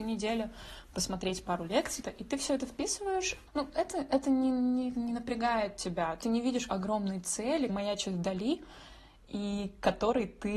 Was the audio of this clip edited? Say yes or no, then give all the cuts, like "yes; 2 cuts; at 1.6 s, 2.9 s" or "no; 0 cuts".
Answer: yes; 6 cuts; at 2.0 s, 3.5 s, 4.9 s, 6.2 s, 6.7 s, 7.7 s